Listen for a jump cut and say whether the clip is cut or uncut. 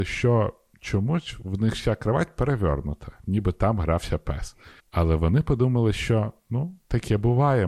cut